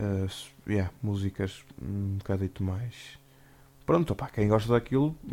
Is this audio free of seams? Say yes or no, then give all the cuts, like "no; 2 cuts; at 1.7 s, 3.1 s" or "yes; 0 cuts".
yes; 0 cuts